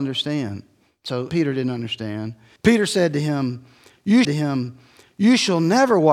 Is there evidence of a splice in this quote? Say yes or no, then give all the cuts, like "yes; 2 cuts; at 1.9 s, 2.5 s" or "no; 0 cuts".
yes; 3 cuts; at 1.3 s, 2.6 s, 4.2 s